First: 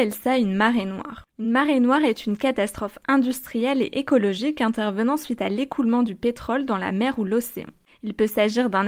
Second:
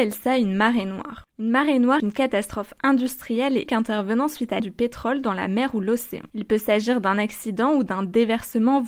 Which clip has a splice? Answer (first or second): second